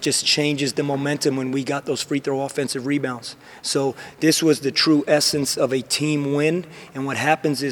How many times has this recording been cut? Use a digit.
0